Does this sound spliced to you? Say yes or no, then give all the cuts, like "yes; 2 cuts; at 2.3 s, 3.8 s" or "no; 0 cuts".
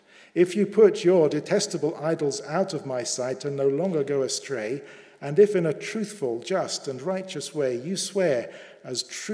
no; 0 cuts